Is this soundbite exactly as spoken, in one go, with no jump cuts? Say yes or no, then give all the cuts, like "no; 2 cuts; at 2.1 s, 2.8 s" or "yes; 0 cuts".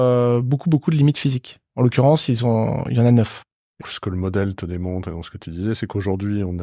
no; 1 cut; at 3.8 s